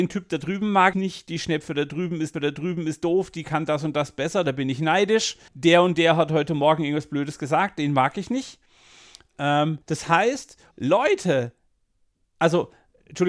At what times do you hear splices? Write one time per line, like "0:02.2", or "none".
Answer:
0:00.9
0:02.3
0:05.5
0:09.8
0:10.7